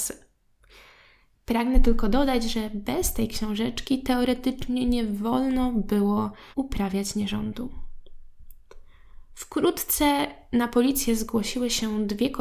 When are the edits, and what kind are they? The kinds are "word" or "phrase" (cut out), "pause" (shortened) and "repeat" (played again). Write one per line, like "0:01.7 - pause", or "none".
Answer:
0:06.5 - pause